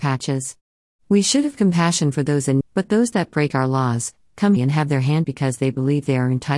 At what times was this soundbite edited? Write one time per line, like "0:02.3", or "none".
0:02.6
0:04.6
0:05.2